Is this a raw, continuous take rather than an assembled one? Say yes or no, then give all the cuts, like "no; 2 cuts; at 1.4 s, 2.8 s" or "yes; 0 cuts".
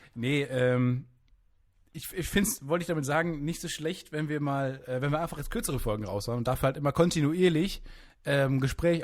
yes; 0 cuts